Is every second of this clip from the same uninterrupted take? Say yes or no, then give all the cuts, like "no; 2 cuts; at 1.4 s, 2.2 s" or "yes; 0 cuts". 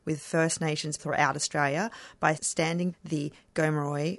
no; 3 cuts; at 1.0 s, 2.4 s, 2.9 s